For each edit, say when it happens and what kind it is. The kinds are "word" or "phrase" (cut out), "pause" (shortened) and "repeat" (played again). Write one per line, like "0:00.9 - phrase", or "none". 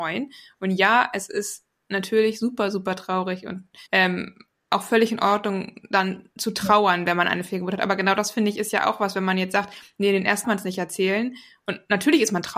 0:03.9 - pause
0:10.4 - phrase